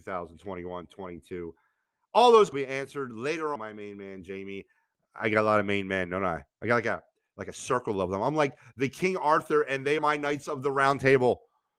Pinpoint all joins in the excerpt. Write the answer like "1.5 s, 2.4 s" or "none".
2.5 s, 3.6 s, 10.0 s